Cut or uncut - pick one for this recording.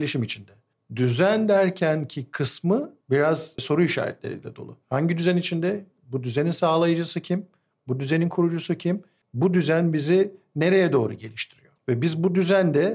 cut